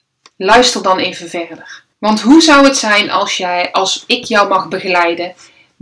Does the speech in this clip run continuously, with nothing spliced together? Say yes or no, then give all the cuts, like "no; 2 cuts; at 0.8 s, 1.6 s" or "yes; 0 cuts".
no; 1 cut; at 1.9 s